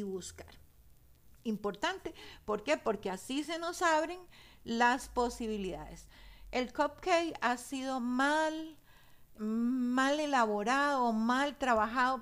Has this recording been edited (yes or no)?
yes